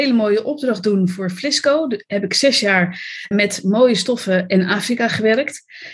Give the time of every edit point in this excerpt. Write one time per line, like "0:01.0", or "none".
0:03.3

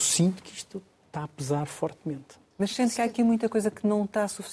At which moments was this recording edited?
0:02.5

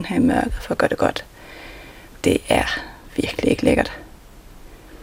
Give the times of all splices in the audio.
0:02.2

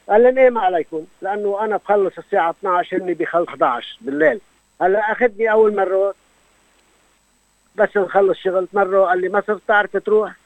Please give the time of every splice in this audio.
0:01.1
0:03.5
0:04.6
0:05.7
0:08.7

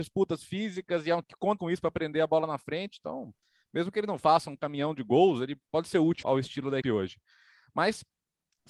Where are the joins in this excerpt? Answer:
0:01.2
0:01.6
0:06.2
0:06.8

